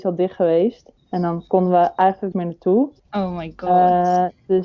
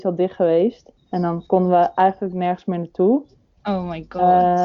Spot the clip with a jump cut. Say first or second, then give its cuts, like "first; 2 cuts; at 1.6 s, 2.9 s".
first; 2 cuts; at 2.3 s, 3.0 s